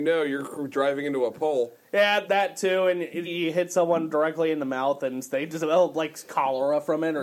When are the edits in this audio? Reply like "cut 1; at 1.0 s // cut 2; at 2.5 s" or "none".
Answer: cut 1; at 2.3 s // cut 2; at 3.2 s